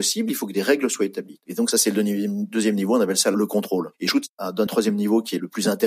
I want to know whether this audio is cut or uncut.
cut